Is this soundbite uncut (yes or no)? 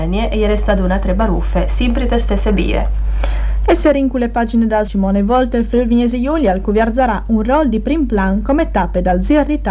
no